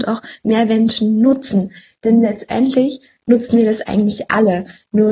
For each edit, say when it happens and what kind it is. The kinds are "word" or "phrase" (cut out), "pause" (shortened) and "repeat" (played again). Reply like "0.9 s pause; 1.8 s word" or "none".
none